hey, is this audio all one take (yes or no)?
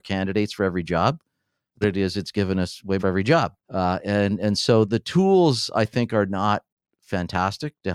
no